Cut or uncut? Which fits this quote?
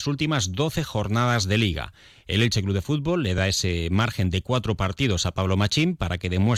uncut